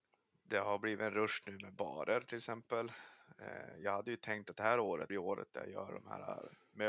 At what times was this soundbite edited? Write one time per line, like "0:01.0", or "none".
0:05.1